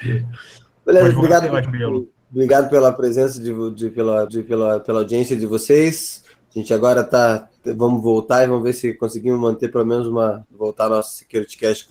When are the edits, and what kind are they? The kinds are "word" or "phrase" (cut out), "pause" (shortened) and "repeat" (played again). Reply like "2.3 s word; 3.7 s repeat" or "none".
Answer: 1.6 s word; 2.2 s pause; 4.3 s repeat; 10.4 s phrase